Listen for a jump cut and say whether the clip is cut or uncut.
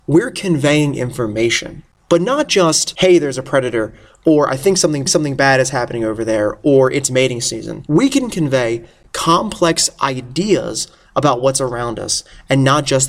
cut